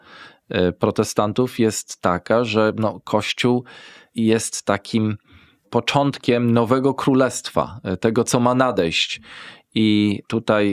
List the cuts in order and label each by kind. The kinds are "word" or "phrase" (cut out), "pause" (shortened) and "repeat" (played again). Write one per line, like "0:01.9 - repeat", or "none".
none

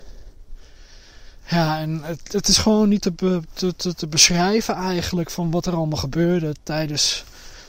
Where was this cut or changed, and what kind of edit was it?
0:01.4 - pause

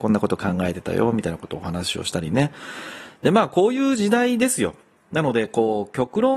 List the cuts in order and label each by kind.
none

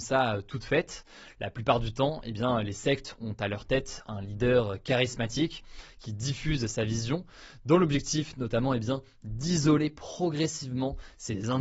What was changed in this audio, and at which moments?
none

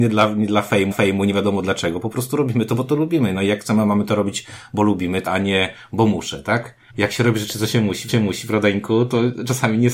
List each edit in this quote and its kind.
0:00.9 - repeat
0:05.3 - phrase
0:06.9 - pause
0:08.1 - repeat

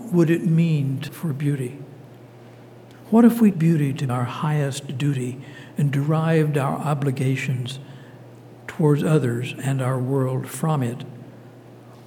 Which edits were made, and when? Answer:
0:01.1 - word
0:03.5 - word
0:04.1 - word

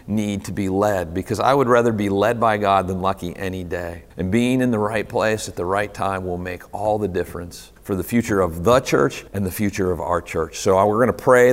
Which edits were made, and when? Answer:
0:04.1 - pause
0:07.8 - pause
0:09.3 - pause

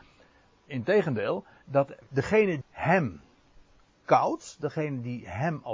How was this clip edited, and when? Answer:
0:02.0 - word
0:02.6 - word

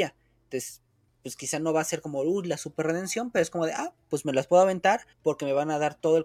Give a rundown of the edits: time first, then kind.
0:05.1 - pause

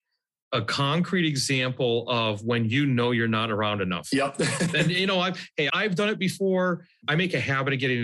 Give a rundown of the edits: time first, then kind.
0:05.7 - word

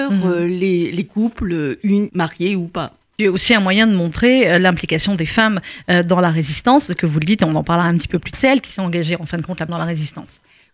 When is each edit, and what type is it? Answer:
0:02.1 - word
0:03.2 - word
0:08.3 - word
0:09.7 - word

